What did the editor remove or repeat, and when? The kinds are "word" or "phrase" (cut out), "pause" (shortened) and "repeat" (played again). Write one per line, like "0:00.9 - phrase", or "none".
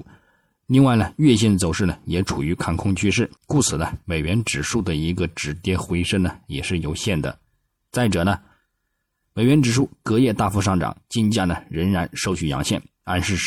0:03.4 - pause